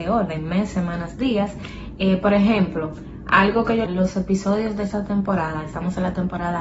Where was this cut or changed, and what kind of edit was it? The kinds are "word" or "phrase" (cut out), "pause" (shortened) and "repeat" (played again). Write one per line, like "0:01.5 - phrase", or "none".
0:03.9 - phrase